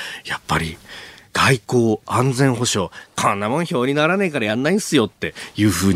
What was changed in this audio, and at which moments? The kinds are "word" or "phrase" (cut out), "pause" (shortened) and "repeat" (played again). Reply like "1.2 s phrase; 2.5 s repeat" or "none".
none